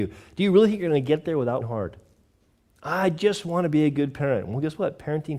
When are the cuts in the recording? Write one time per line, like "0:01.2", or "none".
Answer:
0:01.6
0:02.5

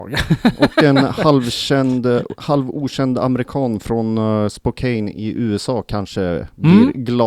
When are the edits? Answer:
none

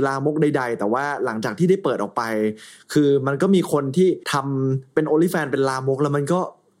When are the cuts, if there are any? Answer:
0:04.2

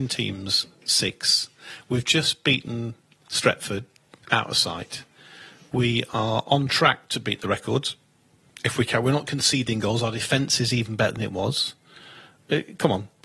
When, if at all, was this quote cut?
none

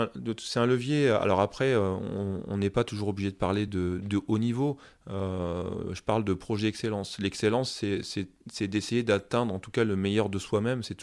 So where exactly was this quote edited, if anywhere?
none

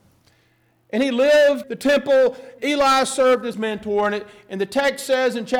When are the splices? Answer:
0:01.6
0:02.6
0:03.5

